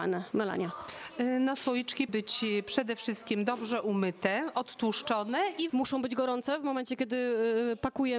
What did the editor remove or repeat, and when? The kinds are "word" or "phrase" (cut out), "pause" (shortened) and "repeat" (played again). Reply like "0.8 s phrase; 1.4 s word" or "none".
2.1 s word; 5.7 s word